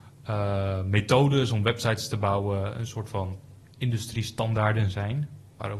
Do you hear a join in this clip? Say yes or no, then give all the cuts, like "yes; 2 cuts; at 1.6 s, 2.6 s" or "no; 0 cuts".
no; 0 cuts